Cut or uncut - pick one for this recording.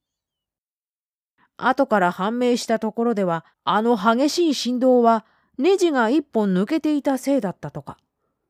cut